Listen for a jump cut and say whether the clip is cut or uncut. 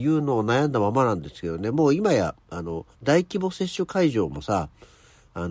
cut